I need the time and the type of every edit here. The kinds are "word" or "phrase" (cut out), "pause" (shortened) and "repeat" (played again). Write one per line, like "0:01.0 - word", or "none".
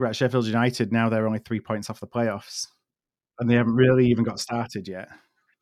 none